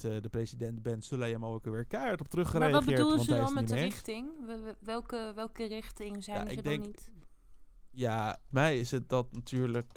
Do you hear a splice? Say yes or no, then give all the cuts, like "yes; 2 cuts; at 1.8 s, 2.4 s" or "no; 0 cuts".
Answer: yes; 1 cut; at 8.5 s